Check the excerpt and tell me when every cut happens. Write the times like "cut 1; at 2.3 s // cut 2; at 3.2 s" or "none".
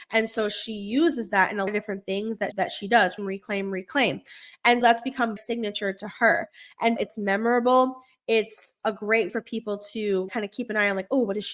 cut 1; at 1.7 s // cut 2; at 2.5 s // cut 3; at 3.2 s // cut 4; at 4.8 s // cut 5; at 5.4 s // cut 6; at 7.0 s // cut 7; at 9.3 s // cut 8; at 10.3 s